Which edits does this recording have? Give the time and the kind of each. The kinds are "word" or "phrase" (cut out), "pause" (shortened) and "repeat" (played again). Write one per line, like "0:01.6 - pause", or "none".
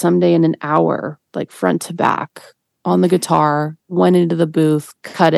none